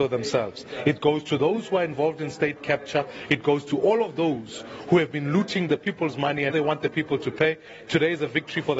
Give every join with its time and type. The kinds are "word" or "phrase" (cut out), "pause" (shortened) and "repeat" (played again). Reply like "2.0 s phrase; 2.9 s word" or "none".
6.5 s word